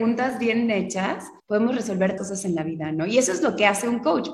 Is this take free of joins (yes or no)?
no